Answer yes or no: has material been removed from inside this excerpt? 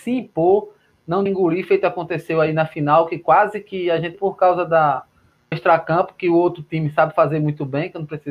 yes